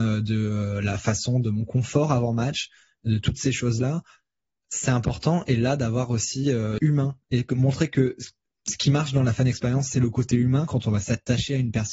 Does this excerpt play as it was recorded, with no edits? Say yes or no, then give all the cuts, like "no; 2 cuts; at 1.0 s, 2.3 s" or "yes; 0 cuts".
no; 1 cut; at 6.8 s